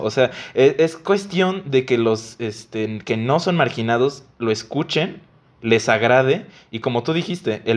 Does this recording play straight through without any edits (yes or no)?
yes